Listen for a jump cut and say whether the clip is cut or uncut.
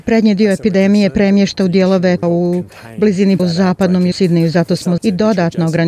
cut